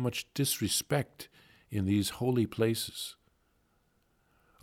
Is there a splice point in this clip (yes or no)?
no